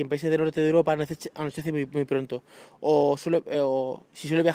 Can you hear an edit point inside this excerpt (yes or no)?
no